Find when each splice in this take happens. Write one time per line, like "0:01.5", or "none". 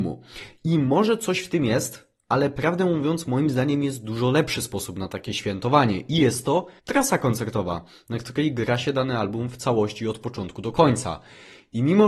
0:06.8